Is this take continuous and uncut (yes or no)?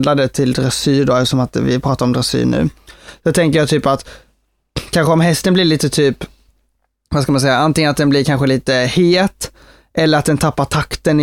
yes